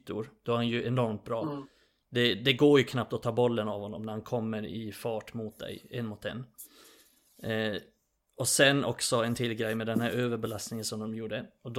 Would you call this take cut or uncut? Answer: uncut